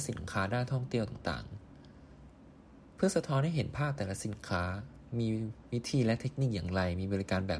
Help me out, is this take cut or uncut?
uncut